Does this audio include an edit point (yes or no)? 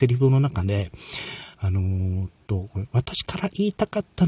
yes